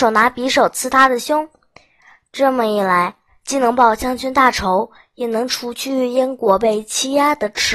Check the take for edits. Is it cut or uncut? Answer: uncut